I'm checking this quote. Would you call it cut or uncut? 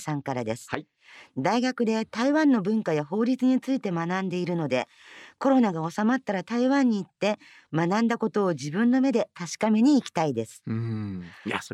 uncut